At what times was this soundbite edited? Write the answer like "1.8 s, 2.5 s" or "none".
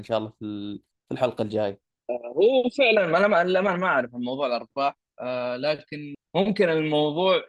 none